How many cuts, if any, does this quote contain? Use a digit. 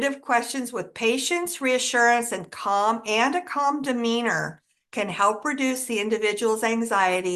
0